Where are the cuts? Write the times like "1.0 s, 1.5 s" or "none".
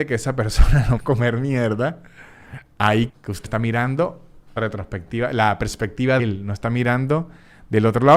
1.0 s, 3.1 s, 3.4 s, 4.6 s, 6.2 s